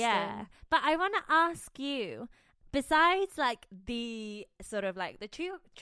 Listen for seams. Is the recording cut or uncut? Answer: uncut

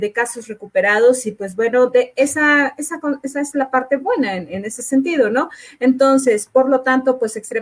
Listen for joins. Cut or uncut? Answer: uncut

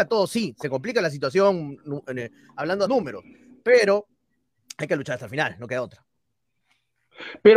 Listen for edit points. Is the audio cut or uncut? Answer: cut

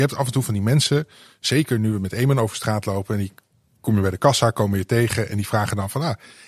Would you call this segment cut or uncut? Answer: uncut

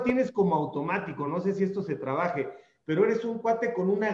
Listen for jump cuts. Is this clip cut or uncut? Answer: uncut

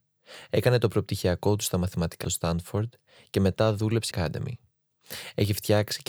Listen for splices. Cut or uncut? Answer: cut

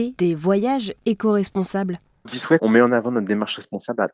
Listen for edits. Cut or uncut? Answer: cut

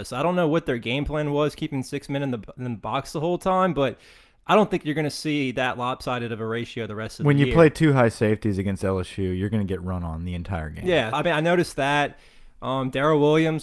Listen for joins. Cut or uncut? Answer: cut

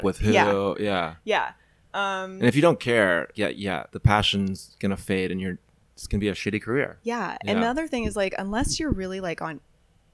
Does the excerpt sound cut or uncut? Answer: cut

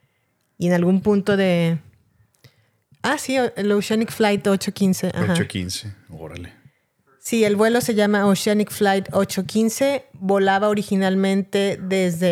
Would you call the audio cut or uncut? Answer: uncut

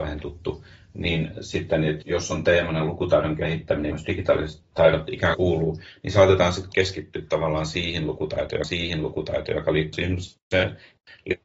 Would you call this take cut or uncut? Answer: cut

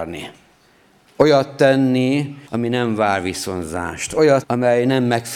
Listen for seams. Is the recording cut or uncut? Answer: cut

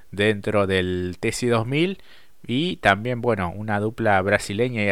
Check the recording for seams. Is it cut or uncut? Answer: uncut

